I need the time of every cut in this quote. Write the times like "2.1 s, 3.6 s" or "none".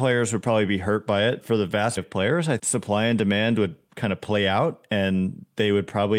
1.4 s, 2.0 s, 2.6 s